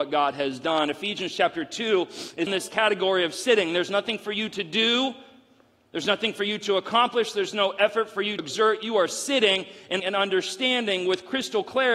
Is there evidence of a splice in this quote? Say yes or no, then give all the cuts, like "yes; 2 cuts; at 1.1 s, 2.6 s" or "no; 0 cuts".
yes; 3 cuts; at 2.5 s, 8.4 s, 10.0 s